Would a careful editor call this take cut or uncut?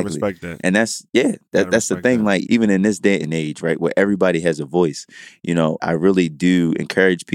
cut